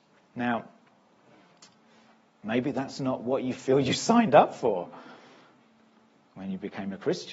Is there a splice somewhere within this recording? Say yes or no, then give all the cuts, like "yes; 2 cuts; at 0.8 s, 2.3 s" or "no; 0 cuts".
no; 0 cuts